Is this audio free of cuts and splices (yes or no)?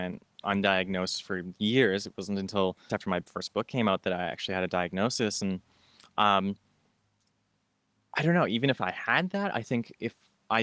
no